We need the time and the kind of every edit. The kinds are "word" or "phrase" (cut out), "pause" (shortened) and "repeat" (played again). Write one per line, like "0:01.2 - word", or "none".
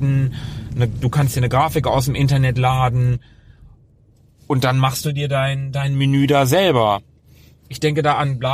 none